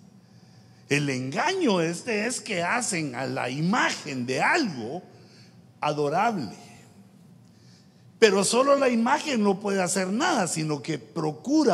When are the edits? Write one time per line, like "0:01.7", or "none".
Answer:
none